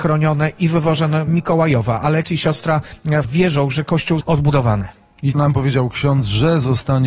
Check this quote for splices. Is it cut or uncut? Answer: cut